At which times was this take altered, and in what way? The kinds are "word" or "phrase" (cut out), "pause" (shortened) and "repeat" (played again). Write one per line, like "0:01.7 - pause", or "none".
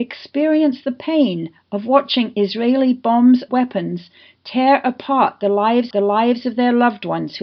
0:03.5 - word
0:05.9 - repeat